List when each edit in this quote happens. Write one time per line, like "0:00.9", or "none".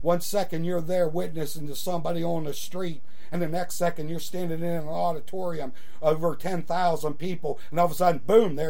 none